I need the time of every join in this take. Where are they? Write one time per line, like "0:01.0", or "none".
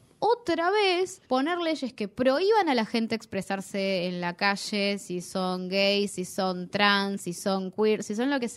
0:01.2